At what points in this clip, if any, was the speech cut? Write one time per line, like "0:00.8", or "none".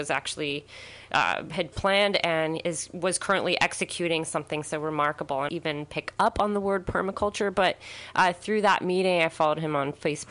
0:05.5